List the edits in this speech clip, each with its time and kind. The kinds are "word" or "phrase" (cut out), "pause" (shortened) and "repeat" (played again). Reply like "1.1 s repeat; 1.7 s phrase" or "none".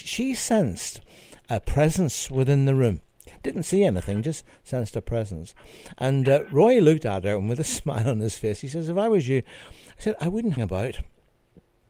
10.6 s word